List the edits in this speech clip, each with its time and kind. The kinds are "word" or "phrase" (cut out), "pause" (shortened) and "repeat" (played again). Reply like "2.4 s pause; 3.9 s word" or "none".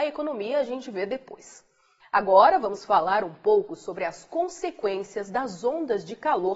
none